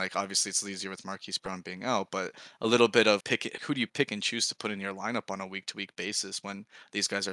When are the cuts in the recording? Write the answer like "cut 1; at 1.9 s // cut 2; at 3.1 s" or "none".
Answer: cut 1; at 3.2 s // cut 2; at 3.6 s